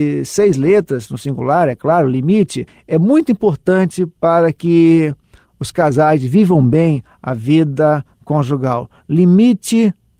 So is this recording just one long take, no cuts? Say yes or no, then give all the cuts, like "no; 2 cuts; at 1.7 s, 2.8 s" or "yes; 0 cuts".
yes; 0 cuts